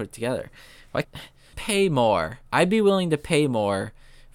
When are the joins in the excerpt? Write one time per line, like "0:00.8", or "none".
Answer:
0:01.0
0:01.5
0:02.5